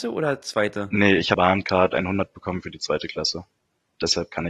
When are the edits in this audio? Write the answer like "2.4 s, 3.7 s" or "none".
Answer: 1.3 s